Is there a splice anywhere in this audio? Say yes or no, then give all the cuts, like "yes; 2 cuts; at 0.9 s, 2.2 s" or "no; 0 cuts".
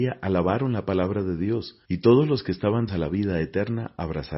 yes; 2 cuts; at 1.8 s, 2.9 s